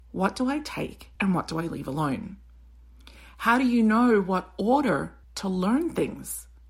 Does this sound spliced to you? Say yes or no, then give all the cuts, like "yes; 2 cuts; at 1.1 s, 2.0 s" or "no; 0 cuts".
yes; 2 cuts; at 1.2 s, 5.2 s